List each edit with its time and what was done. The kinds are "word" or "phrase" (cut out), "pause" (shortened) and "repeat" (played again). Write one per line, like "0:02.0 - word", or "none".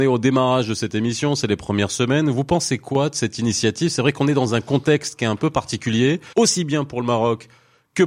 0:06.3 - pause